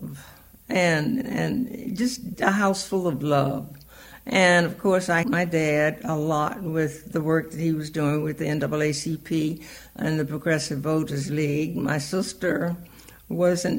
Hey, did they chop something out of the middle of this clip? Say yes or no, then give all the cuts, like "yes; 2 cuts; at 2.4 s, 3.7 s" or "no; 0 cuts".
yes; 3 cuts; at 1.2 s, 2.3 s, 5.2 s